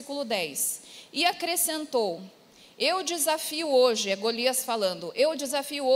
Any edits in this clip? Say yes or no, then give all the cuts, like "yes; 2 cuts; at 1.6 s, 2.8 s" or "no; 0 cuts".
no; 0 cuts